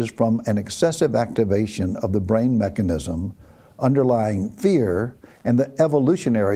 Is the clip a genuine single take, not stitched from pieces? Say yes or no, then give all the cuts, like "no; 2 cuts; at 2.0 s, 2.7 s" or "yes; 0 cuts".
yes; 0 cuts